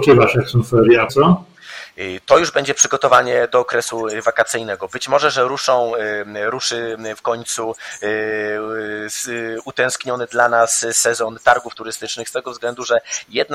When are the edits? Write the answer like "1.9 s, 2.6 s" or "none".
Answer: 1.1 s